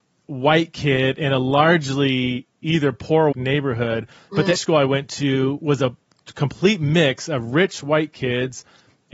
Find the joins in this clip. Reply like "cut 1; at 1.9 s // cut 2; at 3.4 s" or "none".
cut 1; at 3.3 s // cut 2; at 4.6 s